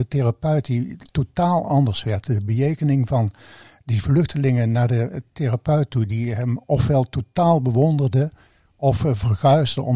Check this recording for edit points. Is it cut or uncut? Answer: uncut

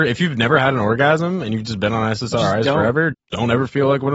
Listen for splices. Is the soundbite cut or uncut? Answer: cut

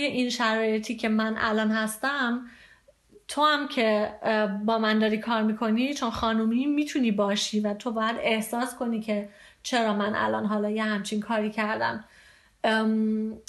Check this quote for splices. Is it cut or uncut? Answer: uncut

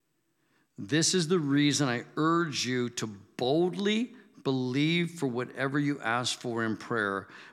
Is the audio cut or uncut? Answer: uncut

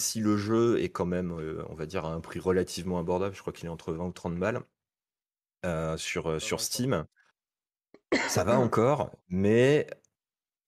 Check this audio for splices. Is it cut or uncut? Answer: uncut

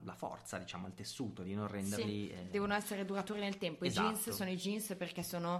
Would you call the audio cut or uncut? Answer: uncut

